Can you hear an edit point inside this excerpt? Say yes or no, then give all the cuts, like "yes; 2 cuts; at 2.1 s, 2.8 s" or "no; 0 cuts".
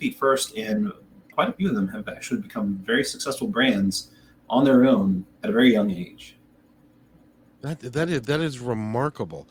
yes; 1 cut; at 5.3 s